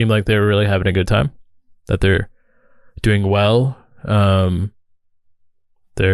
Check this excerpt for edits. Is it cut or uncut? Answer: uncut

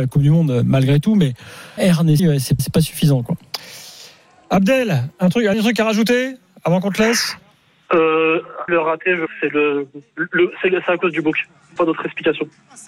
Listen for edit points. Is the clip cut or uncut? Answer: cut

